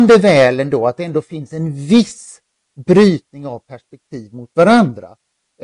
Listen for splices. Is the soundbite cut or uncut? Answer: uncut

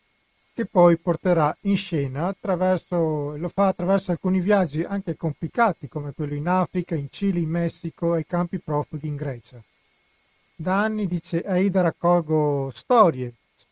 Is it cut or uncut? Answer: uncut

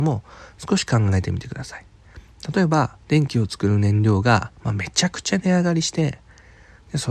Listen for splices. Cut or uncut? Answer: cut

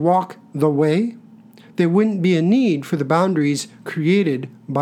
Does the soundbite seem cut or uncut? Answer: uncut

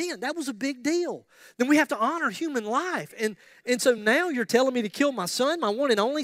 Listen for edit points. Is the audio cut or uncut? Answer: uncut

